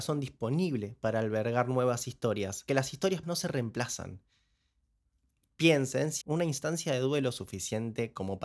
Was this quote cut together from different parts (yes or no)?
yes